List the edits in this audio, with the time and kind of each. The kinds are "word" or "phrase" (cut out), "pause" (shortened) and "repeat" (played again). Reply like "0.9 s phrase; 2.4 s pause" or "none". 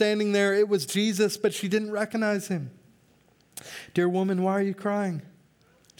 none